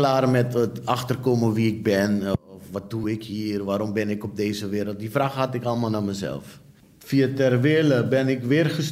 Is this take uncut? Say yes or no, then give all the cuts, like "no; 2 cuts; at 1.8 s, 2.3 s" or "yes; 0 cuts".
yes; 0 cuts